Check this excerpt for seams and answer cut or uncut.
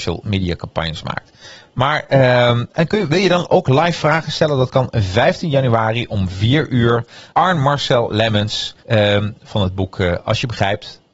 cut